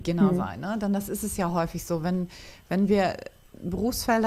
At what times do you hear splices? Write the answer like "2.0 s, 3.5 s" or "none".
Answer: none